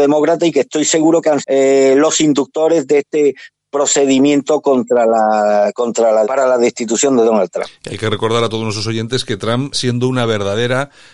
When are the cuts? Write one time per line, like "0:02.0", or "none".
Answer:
0:01.4
0:06.2
0:09.7